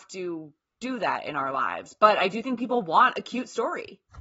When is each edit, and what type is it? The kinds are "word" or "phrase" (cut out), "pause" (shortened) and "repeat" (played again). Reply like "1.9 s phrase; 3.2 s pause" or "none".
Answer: none